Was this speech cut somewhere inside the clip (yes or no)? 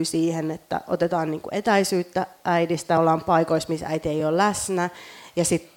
no